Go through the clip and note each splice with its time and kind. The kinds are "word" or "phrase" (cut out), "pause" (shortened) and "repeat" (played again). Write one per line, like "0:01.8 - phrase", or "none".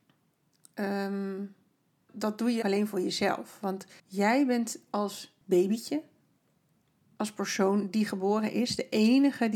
0:02.1 - word
0:02.6 - word
0:04.0 - pause
0:05.4 - pause

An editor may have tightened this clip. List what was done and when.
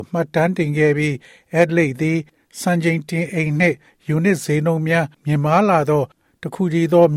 0:05.1 - pause

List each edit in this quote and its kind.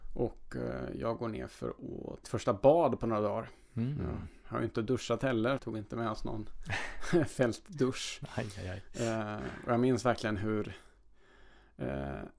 0:02.2 - phrase
0:05.6 - phrase

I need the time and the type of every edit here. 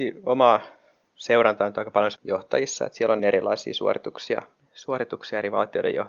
0:02.2 - word
0:03.2 - phrase

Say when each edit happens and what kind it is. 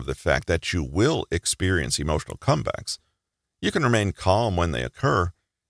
none

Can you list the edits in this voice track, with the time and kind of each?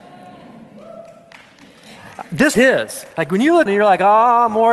0:02.5 - phrase
0:03.1 - pause
0:03.7 - word

